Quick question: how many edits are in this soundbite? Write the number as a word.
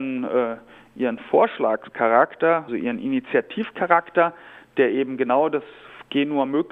one